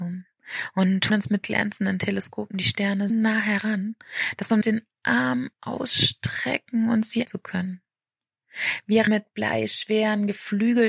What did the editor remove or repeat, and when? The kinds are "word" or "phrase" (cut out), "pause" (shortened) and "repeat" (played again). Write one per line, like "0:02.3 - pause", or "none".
0:01.1 - word
0:01.4 - word
0:03.1 - word
0:04.6 - word
0:05.5 - pause
0:07.2 - word
0:09.1 - word